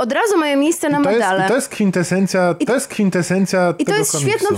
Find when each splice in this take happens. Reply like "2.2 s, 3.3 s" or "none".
2.7 s